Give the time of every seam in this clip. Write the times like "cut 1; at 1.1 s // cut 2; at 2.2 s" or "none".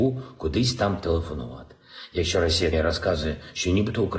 cut 1; at 2.7 s

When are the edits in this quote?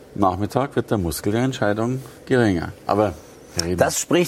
none

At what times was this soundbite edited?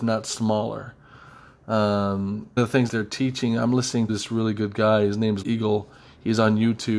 cut 1; at 2.6 s // cut 2; at 2.9 s // cut 3; at 4.1 s // cut 4; at 5.4 s

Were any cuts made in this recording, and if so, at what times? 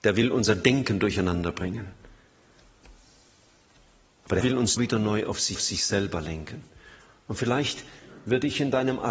cut 1; at 4.4 s // cut 2; at 4.8 s // cut 3; at 5.5 s

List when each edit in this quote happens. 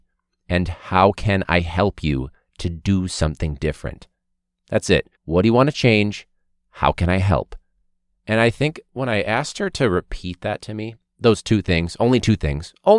cut 1; at 5.1 s

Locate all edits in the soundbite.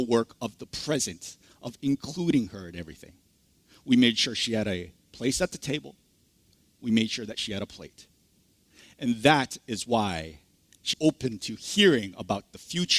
cut 1; at 10.9 s

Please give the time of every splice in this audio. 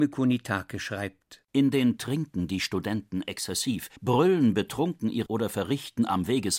cut 1; at 2.0 s // cut 2; at 4.0 s // cut 3; at 5.3 s

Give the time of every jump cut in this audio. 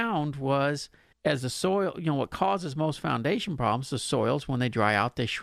cut 1; at 1.1 s

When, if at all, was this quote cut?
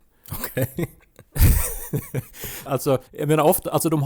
cut 1; at 2.7 s // cut 2; at 3.1 s

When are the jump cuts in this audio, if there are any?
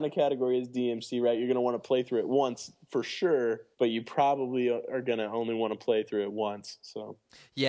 cut 1; at 3.7 s

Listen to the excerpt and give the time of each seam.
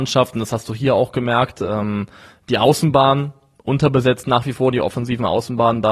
none

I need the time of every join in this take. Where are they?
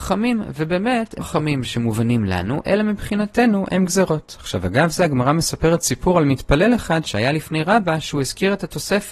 cut 1; at 1.2 s

